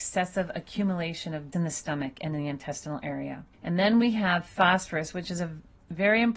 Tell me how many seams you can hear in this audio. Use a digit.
2